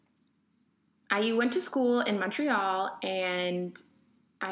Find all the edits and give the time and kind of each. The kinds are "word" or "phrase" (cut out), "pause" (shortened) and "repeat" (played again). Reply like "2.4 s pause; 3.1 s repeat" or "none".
none